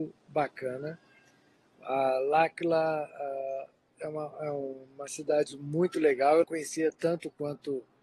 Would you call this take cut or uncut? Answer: cut